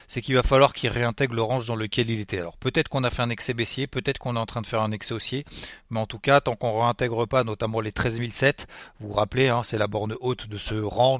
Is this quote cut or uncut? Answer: uncut